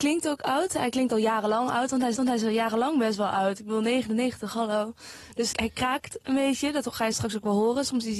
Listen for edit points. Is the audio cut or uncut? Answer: cut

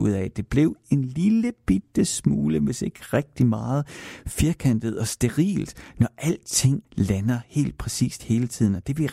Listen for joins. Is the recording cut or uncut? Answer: cut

